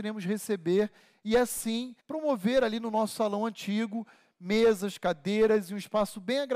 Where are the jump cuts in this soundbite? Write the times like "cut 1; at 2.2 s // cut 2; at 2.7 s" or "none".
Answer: cut 1; at 2.0 s